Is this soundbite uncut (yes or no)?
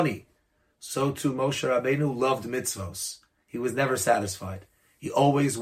yes